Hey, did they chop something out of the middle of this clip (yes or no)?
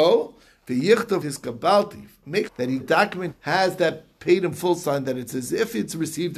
yes